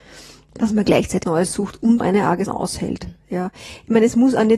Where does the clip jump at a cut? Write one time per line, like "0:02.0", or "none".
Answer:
0:01.2
0:02.0
0:02.5